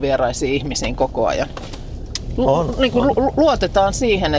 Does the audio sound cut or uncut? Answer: uncut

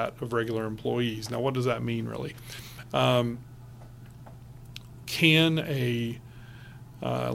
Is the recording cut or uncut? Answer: uncut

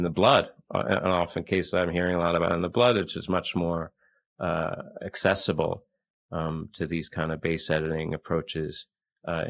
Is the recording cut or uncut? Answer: uncut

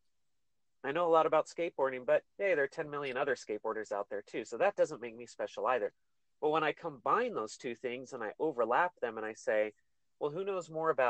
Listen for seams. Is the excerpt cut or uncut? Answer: uncut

